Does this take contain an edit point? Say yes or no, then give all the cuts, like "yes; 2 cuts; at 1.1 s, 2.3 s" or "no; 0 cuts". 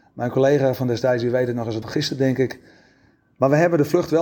yes; 1 cut; at 1.8 s